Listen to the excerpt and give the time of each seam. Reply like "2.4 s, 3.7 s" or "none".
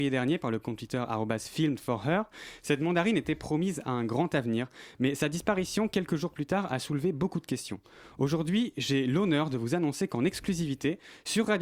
none